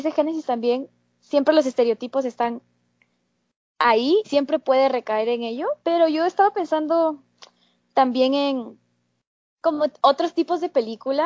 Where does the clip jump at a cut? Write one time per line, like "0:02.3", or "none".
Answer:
0:04.2
0:05.8

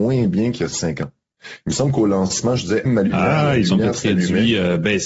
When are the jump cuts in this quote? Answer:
0:02.9

